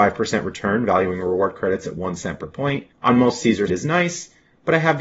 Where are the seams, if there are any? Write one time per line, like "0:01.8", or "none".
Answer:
0:02.9
0:03.7